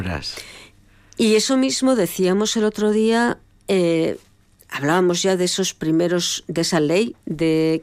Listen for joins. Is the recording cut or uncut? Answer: uncut